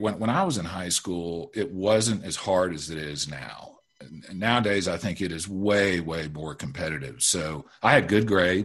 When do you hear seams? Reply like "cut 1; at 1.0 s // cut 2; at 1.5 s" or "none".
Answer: none

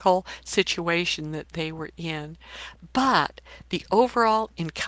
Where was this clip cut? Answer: none

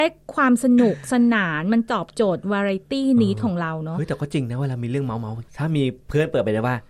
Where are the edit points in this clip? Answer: cut 1; at 5.5 s

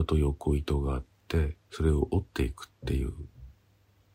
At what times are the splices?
cut 1; at 1.6 s

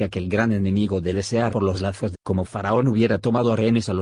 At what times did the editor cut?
cut 1; at 1.1 s // cut 2; at 1.5 s // cut 3; at 2.1 s

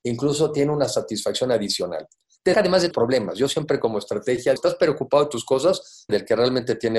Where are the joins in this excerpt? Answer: cut 1; at 2.5 s // cut 2; at 2.9 s // cut 3; at 4.6 s // cut 4; at 6.1 s

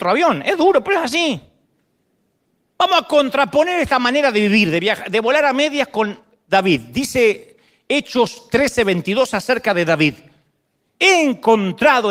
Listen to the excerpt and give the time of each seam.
none

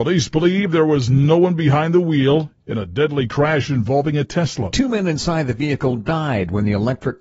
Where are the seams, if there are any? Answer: none

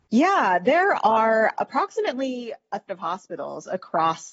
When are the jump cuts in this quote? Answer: cut 1; at 2.9 s

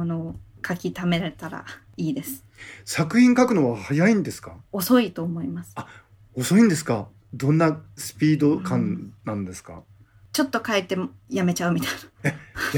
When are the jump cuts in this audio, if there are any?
cut 1; at 4.6 s

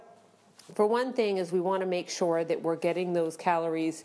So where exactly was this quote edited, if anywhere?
none

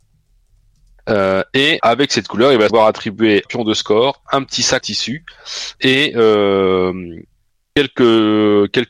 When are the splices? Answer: cut 1; at 1.8 s // cut 2; at 2.7 s // cut 3; at 3.5 s // cut 4; at 4.8 s // cut 5; at 5.7 s

